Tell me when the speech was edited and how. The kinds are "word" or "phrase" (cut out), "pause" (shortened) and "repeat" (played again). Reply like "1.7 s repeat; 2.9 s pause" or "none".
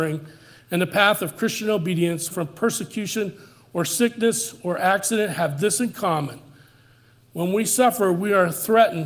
2.3 s word